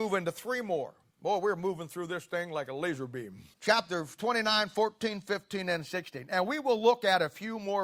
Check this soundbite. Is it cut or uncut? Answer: cut